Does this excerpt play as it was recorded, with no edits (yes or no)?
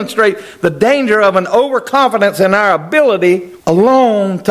no